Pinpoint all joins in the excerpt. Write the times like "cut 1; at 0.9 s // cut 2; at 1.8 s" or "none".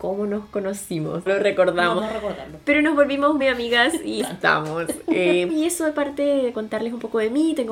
cut 1; at 1.3 s // cut 2; at 2.0 s // cut 3; at 3.4 s // cut 4; at 4.2 s // cut 5; at 5.5 s // cut 6; at 6.5 s